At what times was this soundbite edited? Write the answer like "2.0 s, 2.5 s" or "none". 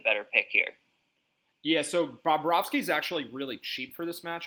none